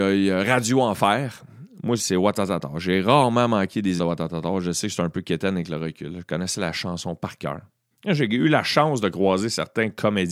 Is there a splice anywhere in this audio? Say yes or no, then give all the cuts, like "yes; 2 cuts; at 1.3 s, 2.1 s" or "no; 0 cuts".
yes; 3 cuts; at 2.0 s, 4.0 s, 7.9 s